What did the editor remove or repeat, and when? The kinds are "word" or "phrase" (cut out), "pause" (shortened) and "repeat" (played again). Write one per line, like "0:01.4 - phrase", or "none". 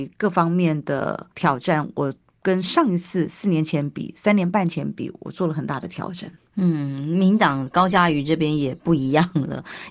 0:01.3 - pause